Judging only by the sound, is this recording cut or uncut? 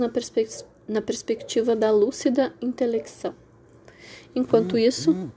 uncut